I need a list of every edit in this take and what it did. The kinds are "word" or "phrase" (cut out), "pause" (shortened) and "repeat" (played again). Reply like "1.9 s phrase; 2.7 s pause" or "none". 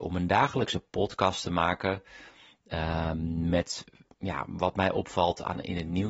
none